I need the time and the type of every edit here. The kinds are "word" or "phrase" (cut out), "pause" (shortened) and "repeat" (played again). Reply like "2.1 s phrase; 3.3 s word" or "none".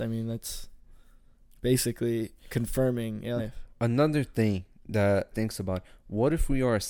3.4 s word; 5.3 s word